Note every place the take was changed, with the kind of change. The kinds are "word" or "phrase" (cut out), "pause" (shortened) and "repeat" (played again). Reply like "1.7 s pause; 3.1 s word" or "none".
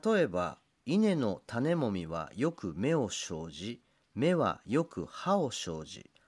none